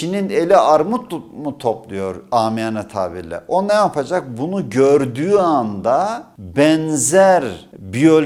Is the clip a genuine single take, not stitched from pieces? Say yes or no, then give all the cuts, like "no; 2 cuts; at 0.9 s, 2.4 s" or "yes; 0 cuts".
yes; 0 cuts